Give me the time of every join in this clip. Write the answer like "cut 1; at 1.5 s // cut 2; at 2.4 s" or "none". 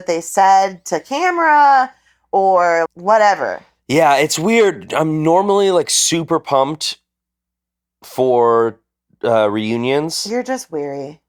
cut 1; at 2.9 s